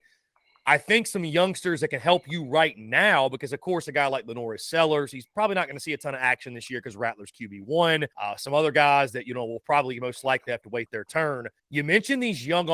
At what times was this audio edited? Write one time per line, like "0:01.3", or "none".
0:08.1
0:11.6